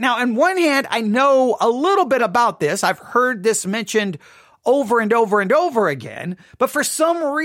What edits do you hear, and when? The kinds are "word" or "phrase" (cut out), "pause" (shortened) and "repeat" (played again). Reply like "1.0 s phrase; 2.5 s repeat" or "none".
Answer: none